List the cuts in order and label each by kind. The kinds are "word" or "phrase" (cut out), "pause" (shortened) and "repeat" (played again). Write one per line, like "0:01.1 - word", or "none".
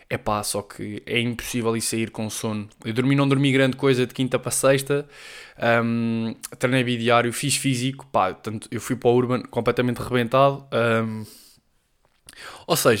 none